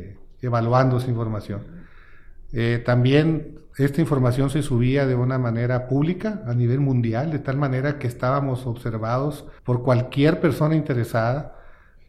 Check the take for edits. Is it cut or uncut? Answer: cut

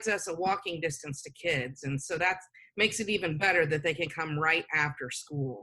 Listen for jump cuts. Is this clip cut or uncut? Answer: uncut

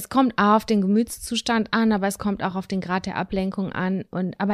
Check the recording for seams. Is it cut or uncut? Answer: uncut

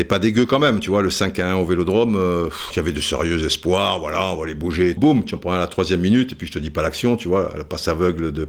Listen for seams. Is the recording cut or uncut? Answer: cut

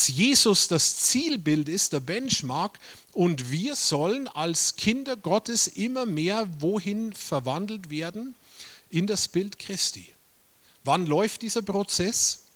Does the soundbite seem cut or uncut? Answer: uncut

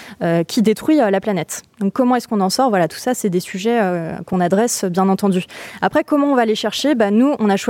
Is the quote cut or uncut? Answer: uncut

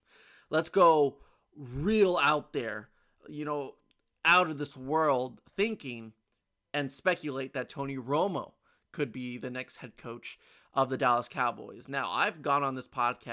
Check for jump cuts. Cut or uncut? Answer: uncut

